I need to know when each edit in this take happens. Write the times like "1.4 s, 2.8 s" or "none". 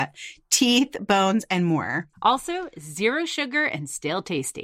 2.1 s